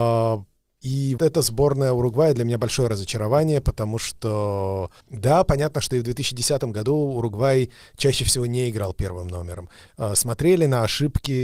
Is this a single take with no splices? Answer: no; 2 cuts; at 1.2 s, 5.0 s

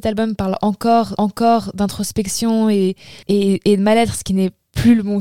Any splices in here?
yes; 2 cuts; at 1.2 s, 3.2 s

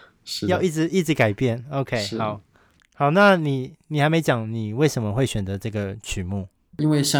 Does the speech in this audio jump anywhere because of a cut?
no; 0 cuts

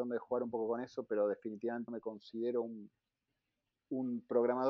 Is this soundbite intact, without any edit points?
no; 1 cut; at 1.9 s

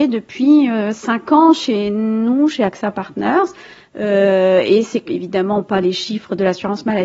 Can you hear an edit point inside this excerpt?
no; 0 cuts

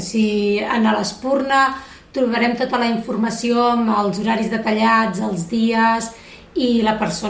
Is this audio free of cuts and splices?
yes; 0 cuts

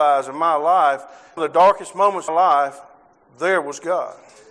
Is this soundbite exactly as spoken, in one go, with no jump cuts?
no; 2 cuts; at 1.4 s, 2.3 s

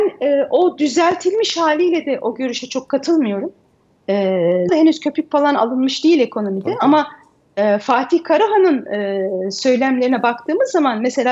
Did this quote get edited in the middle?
yes; 1 cut; at 4.7 s

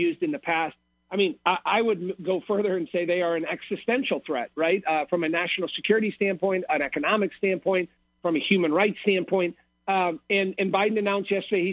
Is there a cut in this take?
no; 0 cuts

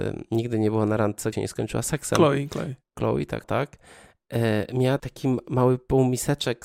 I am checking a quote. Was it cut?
yes; 3 cuts; at 1.3 s, 3.4 s, 5.0 s

